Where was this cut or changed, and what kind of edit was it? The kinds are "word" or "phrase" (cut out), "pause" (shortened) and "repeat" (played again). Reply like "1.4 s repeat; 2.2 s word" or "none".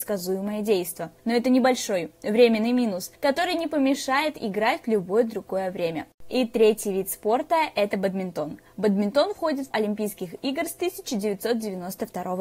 1.2 s pause; 3.1 s pause; 9.7 s word